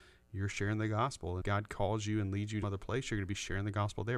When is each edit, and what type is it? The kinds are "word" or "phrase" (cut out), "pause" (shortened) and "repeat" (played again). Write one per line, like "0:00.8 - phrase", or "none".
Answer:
0:01.4 - word
0:02.6 - word